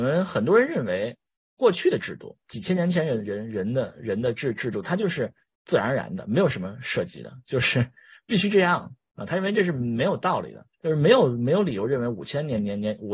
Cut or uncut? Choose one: cut